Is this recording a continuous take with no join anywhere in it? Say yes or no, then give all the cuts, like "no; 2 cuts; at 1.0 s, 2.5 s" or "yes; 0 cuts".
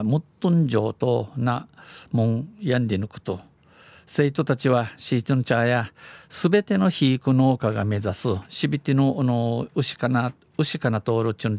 yes; 0 cuts